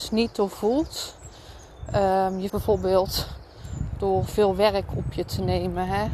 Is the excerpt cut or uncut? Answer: cut